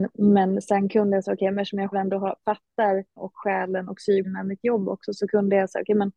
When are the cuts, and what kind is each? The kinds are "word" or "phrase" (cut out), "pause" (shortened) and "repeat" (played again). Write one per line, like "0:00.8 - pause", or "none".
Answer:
0:01.9 - word
0:03.2 - word
0:04.2 - phrase